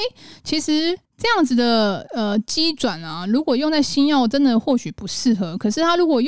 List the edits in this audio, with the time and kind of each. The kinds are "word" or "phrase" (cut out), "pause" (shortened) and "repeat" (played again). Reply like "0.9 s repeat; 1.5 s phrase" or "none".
1.0 s pause